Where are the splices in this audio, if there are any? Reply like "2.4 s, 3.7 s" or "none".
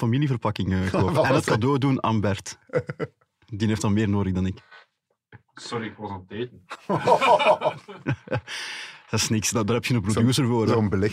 none